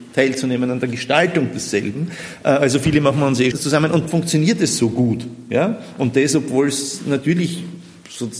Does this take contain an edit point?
yes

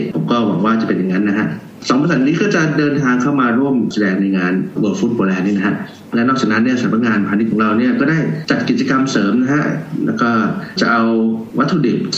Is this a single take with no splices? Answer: yes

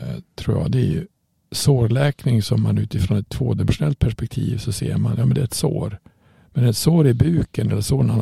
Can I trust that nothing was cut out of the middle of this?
yes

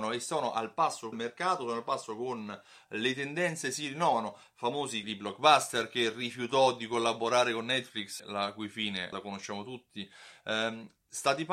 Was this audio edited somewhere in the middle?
yes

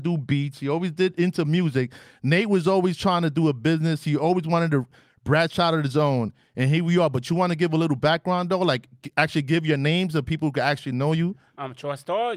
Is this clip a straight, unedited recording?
yes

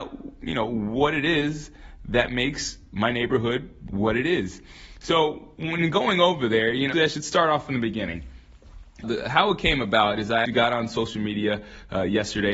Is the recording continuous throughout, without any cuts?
no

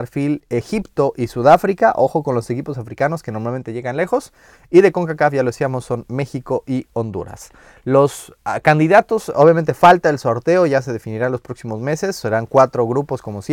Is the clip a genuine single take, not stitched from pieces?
yes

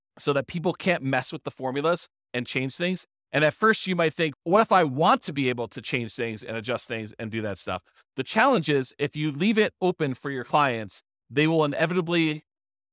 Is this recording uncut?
no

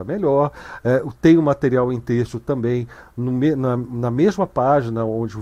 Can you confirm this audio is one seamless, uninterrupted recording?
yes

